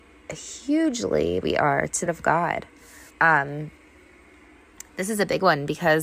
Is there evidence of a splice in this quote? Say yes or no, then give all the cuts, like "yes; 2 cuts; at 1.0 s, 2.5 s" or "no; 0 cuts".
yes; 3 cuts; at 1.4 s, 2.1 s, 3.1 s